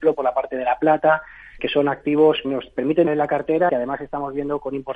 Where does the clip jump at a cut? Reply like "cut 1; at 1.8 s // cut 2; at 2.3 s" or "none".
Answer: cut 1; at 1.6 s // cut 2; at 2.4 s // cut 3; at 3.1 s // cut 4; at 3.7 s

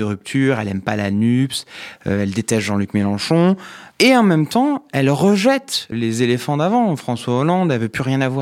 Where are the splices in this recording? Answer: cut 1; at 3.9 s // cut 2; at 5.9 s

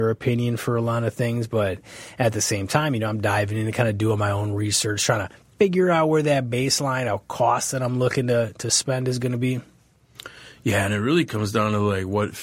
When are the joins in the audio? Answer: none

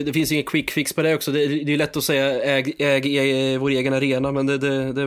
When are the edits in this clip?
none

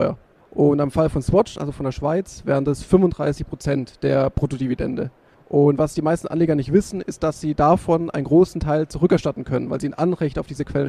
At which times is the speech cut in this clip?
none

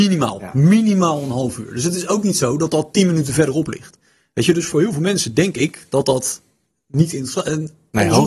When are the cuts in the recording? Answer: none

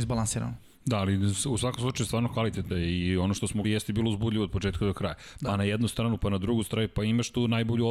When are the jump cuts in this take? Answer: cut 1; at 2.7 s // cut 2; at 3.6 s

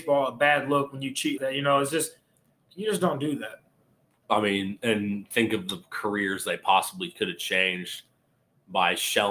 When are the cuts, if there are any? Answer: cut 1; at 1.4 s

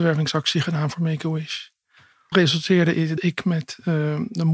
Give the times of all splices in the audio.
cut 1; at 2.3 s // cut 2; at 3.2 s

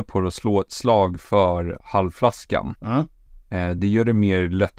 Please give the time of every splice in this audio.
none

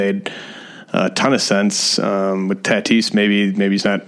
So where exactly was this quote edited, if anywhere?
none

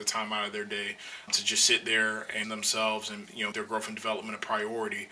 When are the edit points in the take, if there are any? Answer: cut 1; at 1.3 s // cut 2; at 2.4 s // cut 3; at 3.5 s

